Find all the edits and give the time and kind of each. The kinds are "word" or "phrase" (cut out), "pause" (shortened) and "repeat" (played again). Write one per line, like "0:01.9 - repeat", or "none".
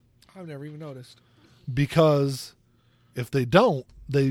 none